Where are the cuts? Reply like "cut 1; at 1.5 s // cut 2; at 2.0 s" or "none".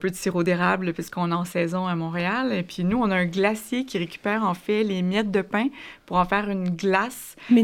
none